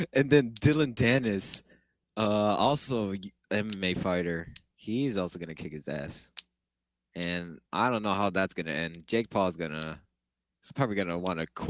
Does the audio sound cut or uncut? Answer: cut